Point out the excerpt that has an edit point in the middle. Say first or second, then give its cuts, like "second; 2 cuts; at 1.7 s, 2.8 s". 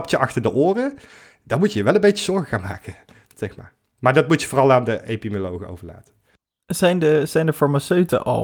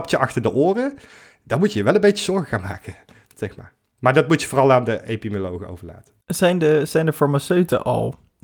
second; 1 cut; at 6.2 s